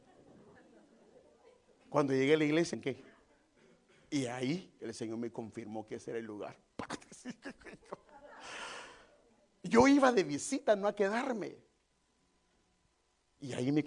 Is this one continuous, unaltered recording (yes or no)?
no